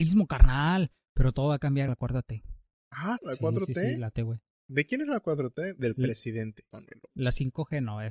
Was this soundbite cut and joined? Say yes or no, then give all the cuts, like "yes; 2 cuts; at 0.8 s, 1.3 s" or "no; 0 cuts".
yes; 4 cuts; at 1.9 s, 3.2 s, 4.1 s, 6.7 s